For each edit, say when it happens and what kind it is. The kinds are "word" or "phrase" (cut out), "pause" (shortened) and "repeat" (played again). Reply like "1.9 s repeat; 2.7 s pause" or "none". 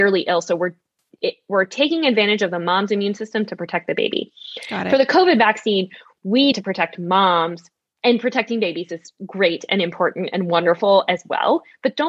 6.5 s word